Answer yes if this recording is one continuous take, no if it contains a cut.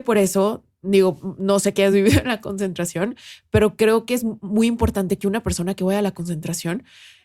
yes